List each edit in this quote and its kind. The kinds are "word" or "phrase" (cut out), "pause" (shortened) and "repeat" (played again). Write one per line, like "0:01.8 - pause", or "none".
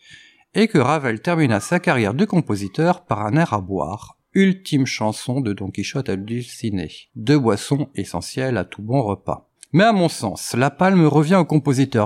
0:07.1 - pause
0:09.6 - pause